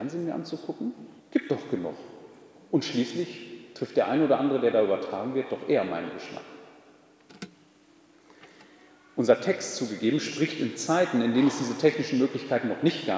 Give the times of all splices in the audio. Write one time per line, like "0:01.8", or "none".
0:01.2